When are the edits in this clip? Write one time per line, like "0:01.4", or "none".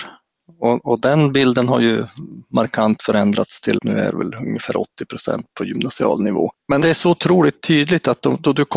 0:03.8
0:06.8